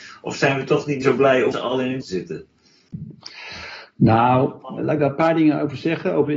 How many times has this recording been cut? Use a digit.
4